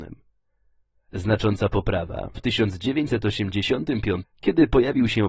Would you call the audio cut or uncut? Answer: cut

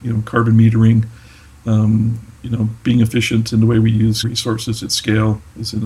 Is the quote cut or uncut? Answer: cut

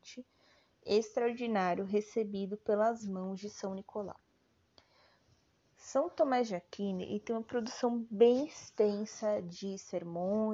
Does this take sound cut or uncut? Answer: uncut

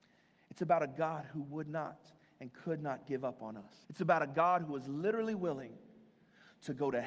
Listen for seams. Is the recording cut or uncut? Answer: cut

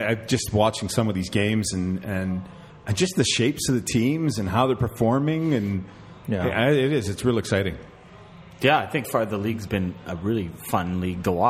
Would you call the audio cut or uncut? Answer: cut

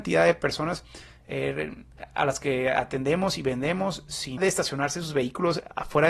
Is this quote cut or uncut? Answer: cut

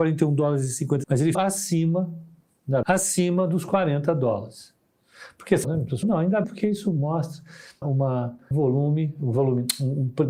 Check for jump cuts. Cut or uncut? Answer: cut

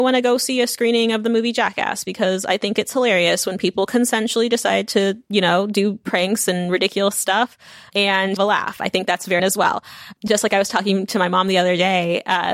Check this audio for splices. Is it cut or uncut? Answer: cut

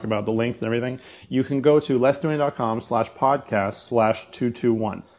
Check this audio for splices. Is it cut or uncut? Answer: uncut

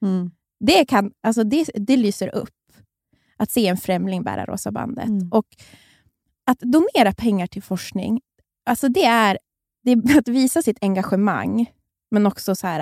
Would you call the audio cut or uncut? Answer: uncut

